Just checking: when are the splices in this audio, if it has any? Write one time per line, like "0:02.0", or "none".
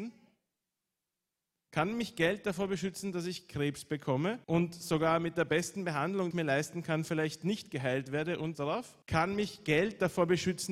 0:04.4
0:06.3
0:08.5
0:09.0